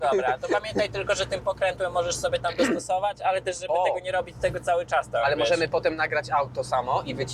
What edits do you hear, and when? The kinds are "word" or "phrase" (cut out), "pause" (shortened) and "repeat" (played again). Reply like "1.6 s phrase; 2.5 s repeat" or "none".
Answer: none